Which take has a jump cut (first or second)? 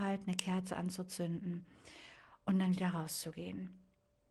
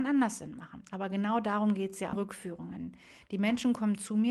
second